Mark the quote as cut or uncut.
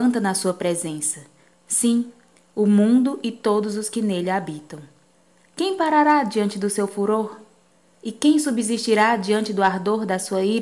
uncut